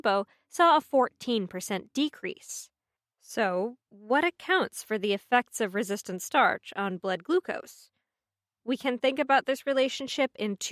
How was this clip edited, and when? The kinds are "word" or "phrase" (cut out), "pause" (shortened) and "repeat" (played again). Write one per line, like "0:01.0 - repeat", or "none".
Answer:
none